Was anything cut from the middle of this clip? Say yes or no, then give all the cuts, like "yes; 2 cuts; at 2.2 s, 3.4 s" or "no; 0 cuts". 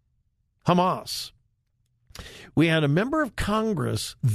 no; 0 cuts